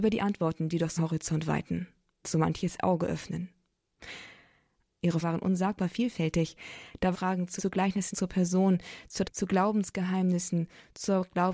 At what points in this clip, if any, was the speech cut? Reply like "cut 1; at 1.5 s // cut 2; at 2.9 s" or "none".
cut 1; at 1.0 s // cut 2; at 2.2 s // cut 3; at 5.2 s // cut 4; at 7.1 s // cut 5; at 7.6 s // cut 6; at 8.1 s // cut 7; at 9.2 s